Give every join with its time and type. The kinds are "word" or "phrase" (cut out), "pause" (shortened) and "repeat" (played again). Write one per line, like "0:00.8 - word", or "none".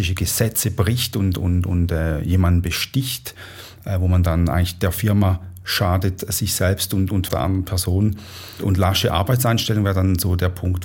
0:07.3 - phrase